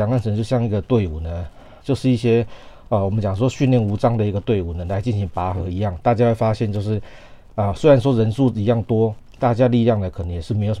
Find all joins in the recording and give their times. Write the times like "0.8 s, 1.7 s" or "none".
1.8 s

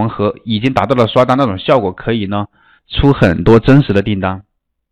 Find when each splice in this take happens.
none

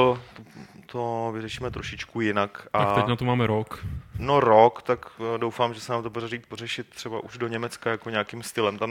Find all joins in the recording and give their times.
none

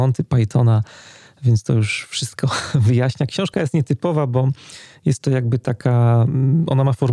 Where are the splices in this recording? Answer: none

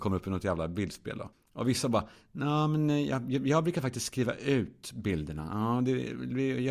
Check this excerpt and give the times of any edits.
1.3 s

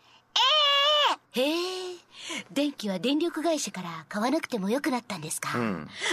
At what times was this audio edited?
1.2 s

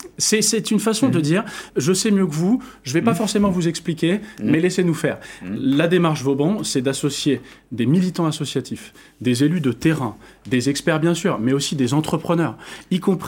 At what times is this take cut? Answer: 1.7 s

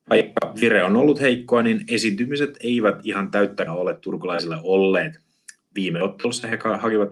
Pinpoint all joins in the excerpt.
3.7 s

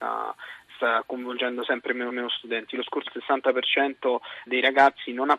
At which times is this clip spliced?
2.1 s, 3.1 s, 4.5 s

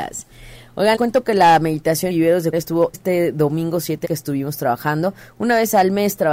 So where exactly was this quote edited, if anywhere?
1.0 s, 2.1 s, 2.5 s, 2.9 s, 4.0 s

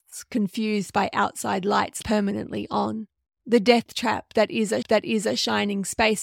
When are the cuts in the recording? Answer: 2.0 s, 3.2 s, 4.8 s

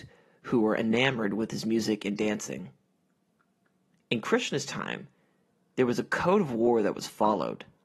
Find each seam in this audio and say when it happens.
none

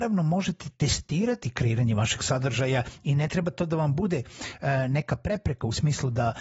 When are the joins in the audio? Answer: none

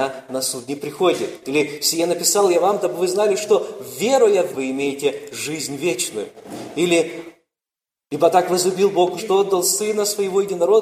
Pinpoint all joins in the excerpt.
4.5 s, 9.2 s

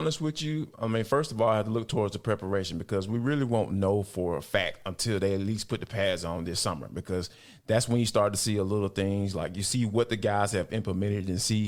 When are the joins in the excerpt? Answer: none

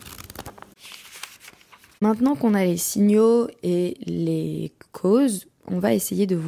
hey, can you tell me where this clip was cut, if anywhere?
none

